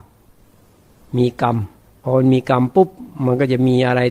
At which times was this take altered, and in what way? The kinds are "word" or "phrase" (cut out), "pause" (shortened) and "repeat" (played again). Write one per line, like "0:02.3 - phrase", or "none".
0:01.8 - pause

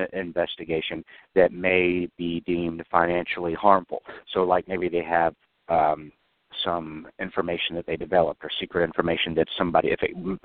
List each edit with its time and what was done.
none

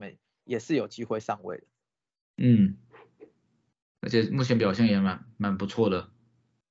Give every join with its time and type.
none

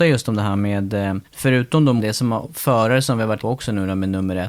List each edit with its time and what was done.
0:01.2 - pause
0:02.0 - word
0:02.4 - word
0:03.4 - word

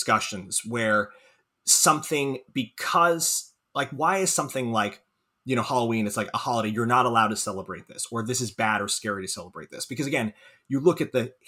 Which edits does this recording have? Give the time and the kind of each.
none

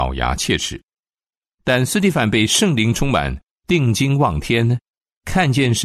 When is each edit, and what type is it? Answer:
none

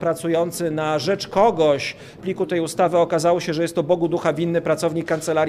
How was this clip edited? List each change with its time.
0:02.2 - phrase

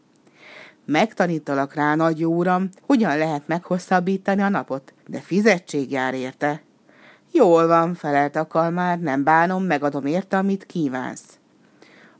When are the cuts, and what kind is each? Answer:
0:02.8 - pause
0:05.0 - pause

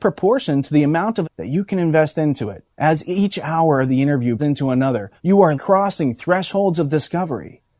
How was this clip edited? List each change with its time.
0:01.2 - phrase
0:02.7 - pause
0:04.4 - word
0:05.2 - pause
0:05.5 - word

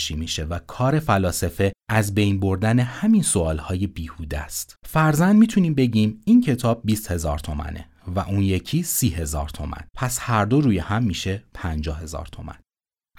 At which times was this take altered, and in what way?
0:04.8 - pause
0:09.9 - pause

